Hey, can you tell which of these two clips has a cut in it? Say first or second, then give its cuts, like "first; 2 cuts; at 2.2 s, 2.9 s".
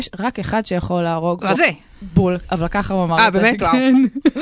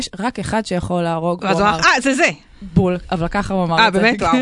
first; 1 cut; at 1.5 s